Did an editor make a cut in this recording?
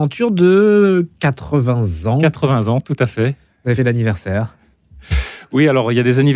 yes; 1 cut; at 3.8 s

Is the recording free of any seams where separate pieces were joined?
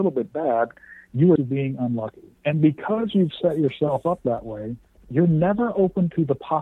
no; 3 cuts; at 1.4 s, 2.4 s, 4.8 s

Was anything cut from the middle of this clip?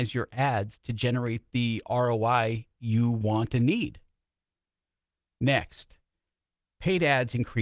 no; 0 cuts

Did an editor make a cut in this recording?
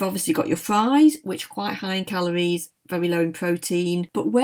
no; 0 cuts

